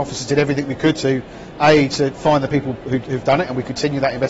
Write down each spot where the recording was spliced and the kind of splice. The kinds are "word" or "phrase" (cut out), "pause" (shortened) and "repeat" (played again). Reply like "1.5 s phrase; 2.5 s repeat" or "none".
none